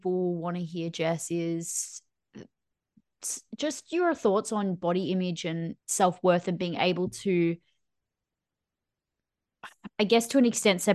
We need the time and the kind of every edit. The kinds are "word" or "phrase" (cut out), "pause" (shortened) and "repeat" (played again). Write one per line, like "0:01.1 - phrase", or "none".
0:05.8 - pause